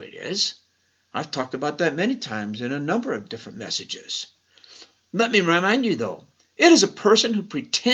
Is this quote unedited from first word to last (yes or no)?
yes